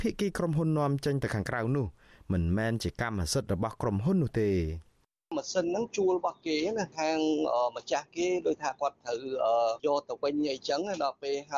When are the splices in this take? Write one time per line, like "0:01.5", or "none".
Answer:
none

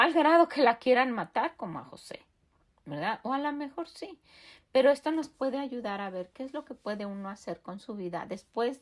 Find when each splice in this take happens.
none

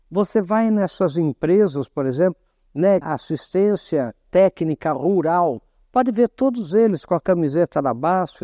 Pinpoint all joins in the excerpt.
0:03.0

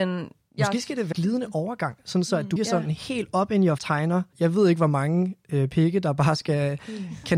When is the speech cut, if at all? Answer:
0:01.1
0:02.6
0:03.8
0:04.3

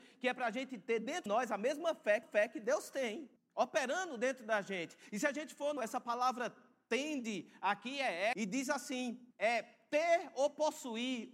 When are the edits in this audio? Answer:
0:01.3
0:02.2
0:03.4
0:05.8
0:08.3
0:09.3

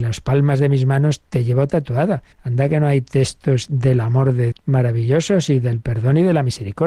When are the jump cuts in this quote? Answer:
0:02.3
0:04.5

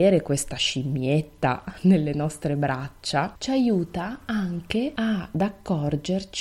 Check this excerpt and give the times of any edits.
none

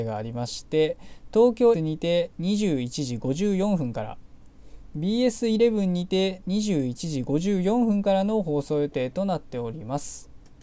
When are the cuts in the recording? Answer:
0:01.7

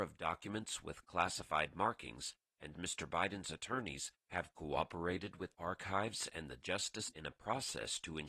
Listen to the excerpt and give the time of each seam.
0:02.7
0:05.5
0:07.1

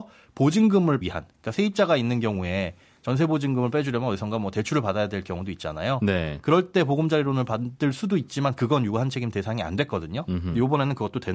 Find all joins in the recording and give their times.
0:01.0

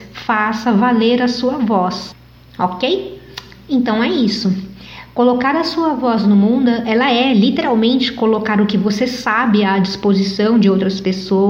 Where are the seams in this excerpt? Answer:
none

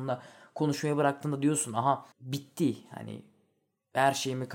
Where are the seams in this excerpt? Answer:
0:02.1

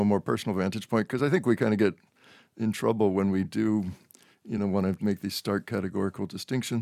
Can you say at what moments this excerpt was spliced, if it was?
none

